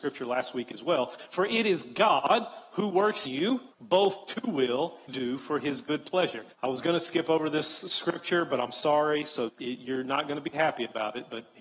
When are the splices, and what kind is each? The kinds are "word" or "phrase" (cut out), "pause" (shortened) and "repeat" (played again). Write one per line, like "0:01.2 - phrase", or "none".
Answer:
0:03.2 - word
0:03.7 - pause
0:05.1 - phrase
0:06.5 - pause
0:09.5 - word